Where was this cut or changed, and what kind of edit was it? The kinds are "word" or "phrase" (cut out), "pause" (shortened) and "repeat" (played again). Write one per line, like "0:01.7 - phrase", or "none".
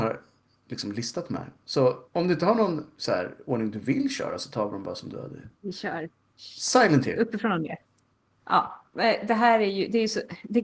0:02.1 - pause
0:05.5 - pause

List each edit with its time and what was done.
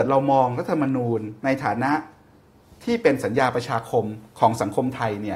0:01.4 - pause

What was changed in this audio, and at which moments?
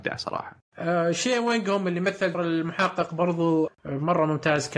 0:02.3 - word
0:03.7 - word

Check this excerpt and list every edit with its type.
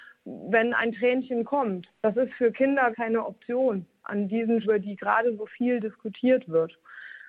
0:02.0 - pause
0:02.9 - phrase
0:04.6 - phrase

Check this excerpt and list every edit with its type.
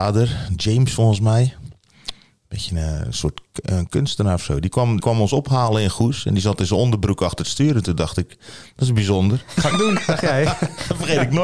0:05.0 - word
0:09.7 - word

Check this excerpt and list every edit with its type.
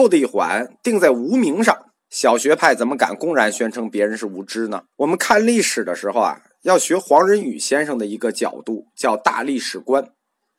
0:02.0 - pause
0:04.9 - pause

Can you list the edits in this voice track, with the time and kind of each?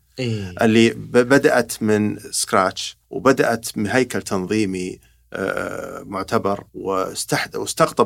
0:03.0 - pause
0:06.7 - pause

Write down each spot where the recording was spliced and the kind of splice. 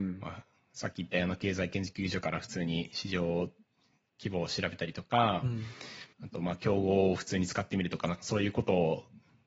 0:06.1 - pause

